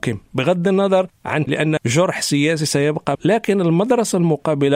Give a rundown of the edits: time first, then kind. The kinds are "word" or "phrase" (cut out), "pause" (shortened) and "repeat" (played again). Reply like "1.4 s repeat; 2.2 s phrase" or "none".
1.5 s word; 1.8 s word; 3.1 s word